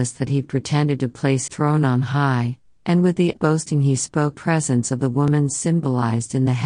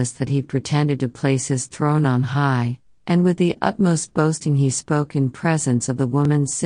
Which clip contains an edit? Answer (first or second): first